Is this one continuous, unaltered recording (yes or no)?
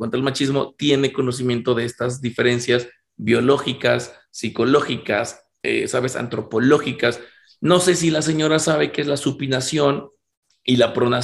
yes